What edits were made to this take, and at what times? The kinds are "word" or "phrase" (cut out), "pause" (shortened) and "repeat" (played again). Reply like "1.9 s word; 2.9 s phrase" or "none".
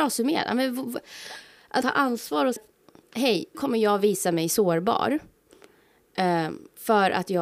1.8 s word; 2.6 s word; 3.5 s word